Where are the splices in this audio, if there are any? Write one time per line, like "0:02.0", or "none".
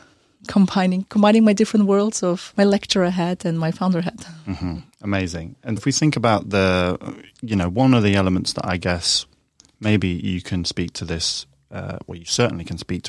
0:02.5
0:05.8